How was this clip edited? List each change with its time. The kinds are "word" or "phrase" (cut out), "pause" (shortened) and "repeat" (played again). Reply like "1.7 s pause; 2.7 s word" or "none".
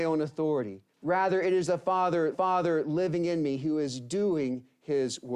0.9 s pause; 2.3 s repeat